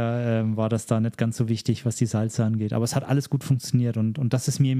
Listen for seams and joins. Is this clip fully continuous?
yes; 0 cuts

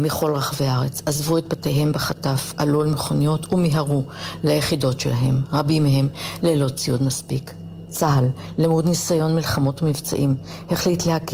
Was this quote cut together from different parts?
no; 0 cuts

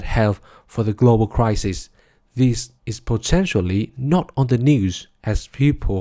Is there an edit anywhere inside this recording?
yes; 1 cut; at 2.8 s

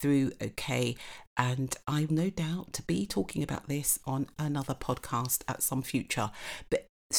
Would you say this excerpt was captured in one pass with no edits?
no; 2 cuts; at 2.1 s, 5.8 s

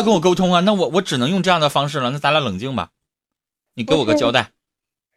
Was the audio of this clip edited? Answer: no; 0 cuts

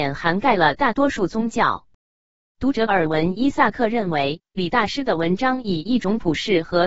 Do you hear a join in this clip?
no; 0 cuts

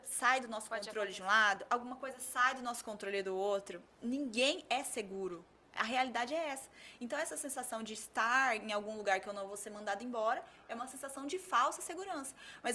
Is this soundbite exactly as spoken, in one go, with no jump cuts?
yes; 0 cuts

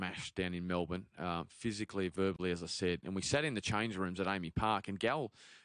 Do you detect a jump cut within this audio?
no; 0 cuts

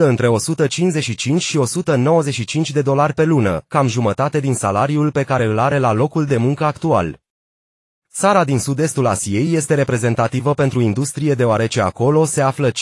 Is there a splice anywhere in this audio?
no; 0 cuts

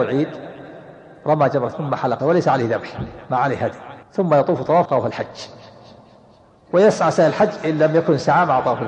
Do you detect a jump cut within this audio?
yes; 5 cuts; at 1.7 s, 2.2 s, 3.2 s, 4.0 s, 4.8 s

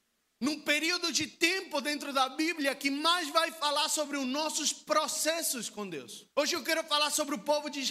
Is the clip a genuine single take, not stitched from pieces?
no; 1 cut; at 6.3 s

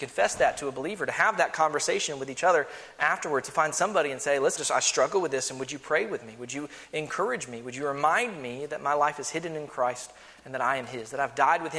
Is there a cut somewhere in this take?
yes; 1 cut; at 4.5 s

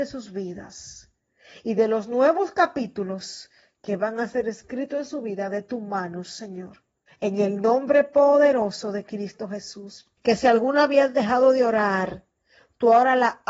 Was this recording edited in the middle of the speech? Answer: yes; 2 cuts; at 7.1 s, 10.2 s

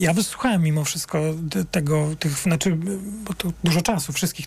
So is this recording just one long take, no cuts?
yes; 0 cuts

